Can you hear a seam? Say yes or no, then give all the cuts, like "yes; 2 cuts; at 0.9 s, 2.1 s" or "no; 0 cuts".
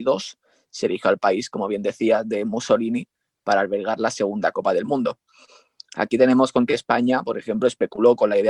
no; 0 cuts